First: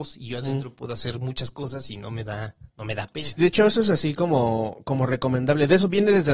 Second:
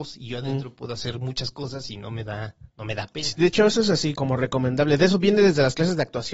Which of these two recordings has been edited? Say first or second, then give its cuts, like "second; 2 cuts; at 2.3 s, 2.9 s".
second; 1 cut; at 4.1 s